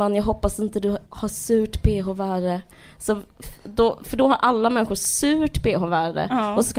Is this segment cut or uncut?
cut